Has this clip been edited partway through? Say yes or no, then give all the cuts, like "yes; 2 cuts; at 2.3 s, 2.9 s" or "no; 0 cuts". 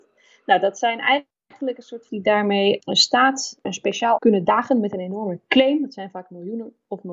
yes; 4 cuts; at 2.1 s, 2.8 s, 3.6 s, 4.2 s